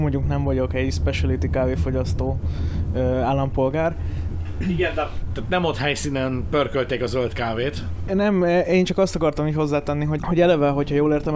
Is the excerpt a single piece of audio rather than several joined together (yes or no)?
no